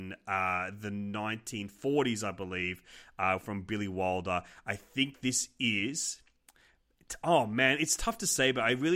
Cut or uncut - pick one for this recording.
uncut